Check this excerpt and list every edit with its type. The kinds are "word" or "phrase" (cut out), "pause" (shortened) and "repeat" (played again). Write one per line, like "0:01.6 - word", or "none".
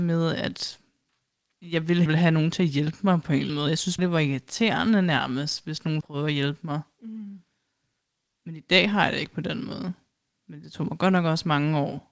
0:02.1 - phrase
0:03.5 - word
0:04.0 - word
0:06.0 - word